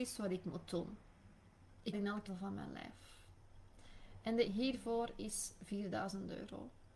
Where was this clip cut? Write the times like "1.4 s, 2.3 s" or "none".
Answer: 1.9 s, 2.3 s, 4.5 s

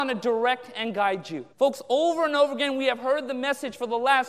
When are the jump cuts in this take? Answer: 1.5 s

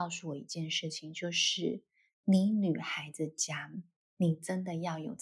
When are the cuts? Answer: 4.0 s

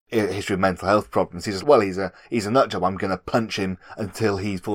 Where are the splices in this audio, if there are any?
1.6 s

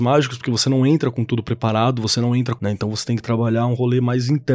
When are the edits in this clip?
2.6 s

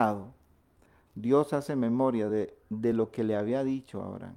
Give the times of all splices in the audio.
none

